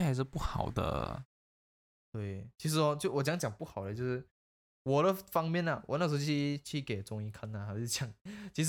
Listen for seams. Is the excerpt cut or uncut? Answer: uncut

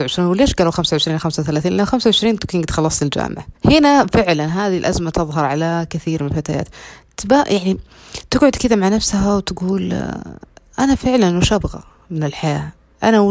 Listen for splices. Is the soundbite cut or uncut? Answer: cut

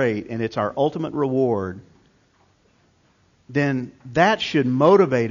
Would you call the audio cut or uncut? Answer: uncut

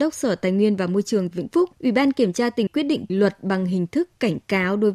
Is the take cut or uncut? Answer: cut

